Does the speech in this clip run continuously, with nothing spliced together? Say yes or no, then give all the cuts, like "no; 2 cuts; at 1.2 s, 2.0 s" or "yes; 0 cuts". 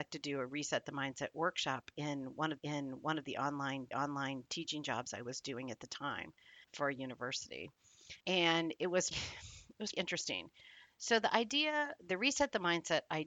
no; 6 cuts; at 2.6 s, 3.9 s, 6.6 s, 8.2 s, 9.1 s, 9.9 s